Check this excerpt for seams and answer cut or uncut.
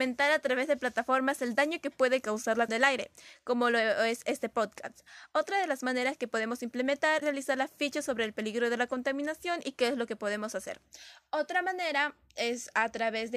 cut